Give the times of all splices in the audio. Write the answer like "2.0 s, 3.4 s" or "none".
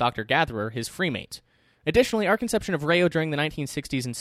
none